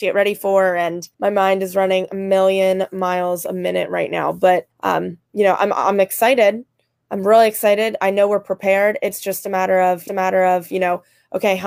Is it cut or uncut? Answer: cut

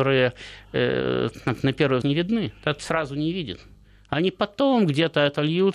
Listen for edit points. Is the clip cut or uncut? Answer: cut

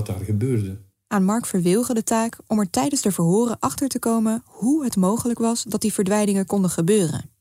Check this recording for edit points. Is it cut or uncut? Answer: uncut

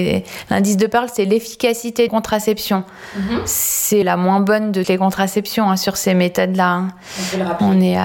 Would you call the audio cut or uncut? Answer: cut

